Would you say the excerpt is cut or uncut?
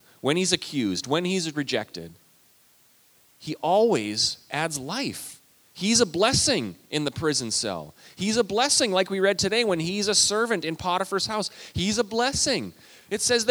uncut